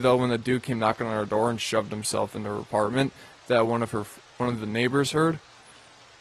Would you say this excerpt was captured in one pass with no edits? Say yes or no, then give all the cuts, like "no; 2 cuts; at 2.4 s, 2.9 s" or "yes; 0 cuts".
yes; 0 cuts